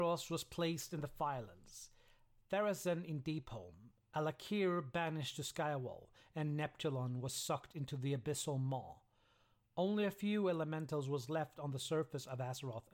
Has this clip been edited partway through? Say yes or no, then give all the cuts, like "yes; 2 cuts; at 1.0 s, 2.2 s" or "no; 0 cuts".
no; 0 cuts